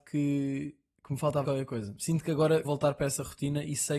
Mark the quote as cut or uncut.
cut